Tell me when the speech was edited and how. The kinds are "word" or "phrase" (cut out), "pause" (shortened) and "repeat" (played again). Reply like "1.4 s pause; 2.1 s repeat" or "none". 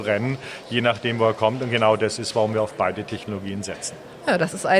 none